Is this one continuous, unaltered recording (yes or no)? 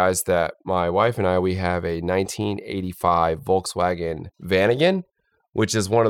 no